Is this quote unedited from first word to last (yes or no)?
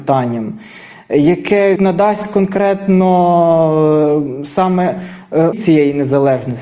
no